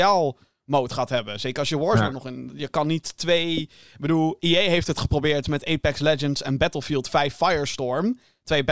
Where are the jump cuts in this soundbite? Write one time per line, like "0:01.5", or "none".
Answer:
none